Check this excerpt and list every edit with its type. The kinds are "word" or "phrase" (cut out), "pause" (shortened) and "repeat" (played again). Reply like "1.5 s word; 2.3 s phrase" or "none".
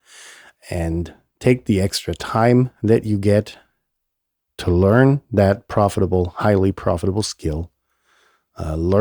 none

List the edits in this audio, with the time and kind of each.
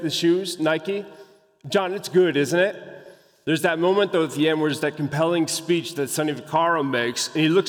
none

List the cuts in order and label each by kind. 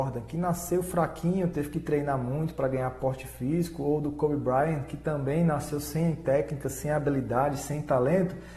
none

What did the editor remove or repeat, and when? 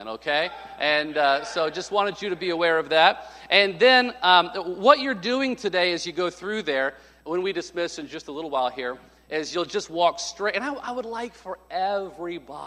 none

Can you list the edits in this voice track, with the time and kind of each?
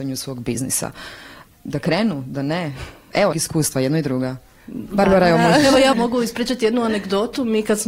3.3 s phrase; 4.6 s pause; 5.9 s word

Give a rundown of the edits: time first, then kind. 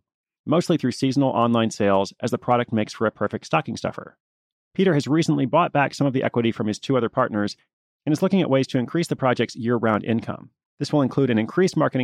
none

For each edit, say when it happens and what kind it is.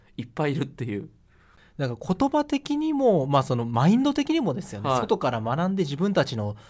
none

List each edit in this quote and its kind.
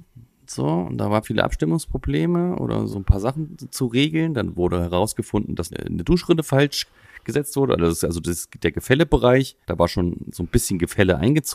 1.2 s phrase; 2.9 s word; 5.7 s word; 9.6 s pause

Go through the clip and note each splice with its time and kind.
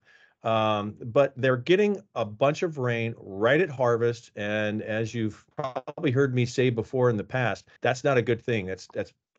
5.5 s pause; 7.8 s pause

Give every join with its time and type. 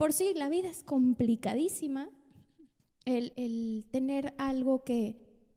3.3 s word

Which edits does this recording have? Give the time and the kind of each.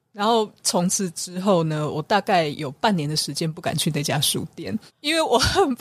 4.9 s pause

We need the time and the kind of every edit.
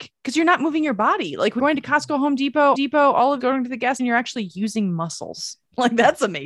1.6 s word; 2.7 s repeat; 3.4 s phrase; 4.0 s word

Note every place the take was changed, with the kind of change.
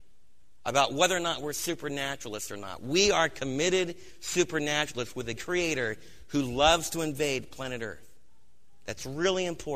5.4 s word

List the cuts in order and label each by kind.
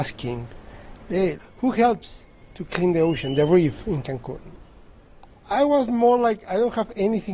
none

